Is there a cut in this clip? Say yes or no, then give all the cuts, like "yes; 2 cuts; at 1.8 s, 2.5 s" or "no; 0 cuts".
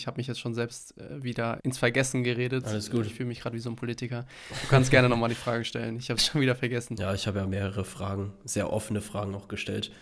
yes; 2 cuts; at 1.6 s, 6.2 s